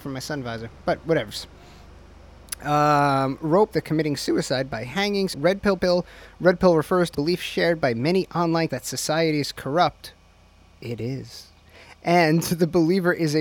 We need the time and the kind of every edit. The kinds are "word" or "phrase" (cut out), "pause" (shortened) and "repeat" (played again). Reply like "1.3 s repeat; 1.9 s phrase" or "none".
3.7 s word; 5.3 s word; 5.8 s word; 7.1 s word; 8.7 s word